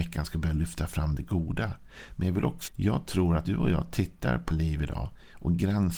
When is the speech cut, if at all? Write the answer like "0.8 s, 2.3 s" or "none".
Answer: 2.7 s, 3.4 s, 4.5 s